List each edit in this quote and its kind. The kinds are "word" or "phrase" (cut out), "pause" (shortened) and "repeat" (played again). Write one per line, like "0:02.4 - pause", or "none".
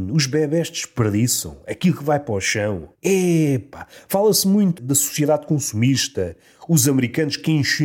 0:02.9 - pause